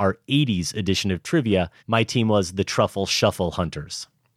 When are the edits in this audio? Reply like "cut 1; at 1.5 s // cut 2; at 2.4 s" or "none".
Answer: cut 1; at 1.8 s